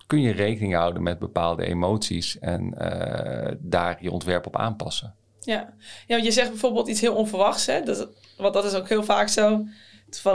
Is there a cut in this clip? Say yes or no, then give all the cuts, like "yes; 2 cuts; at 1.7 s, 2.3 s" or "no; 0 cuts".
no; 0 cuts